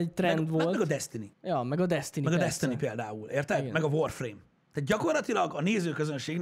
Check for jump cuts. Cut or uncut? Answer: cut